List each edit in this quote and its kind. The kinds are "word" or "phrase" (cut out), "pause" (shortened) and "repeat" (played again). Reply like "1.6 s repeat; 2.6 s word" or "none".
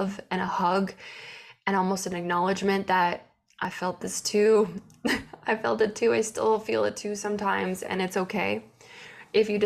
none